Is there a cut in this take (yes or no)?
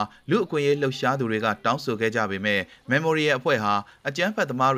no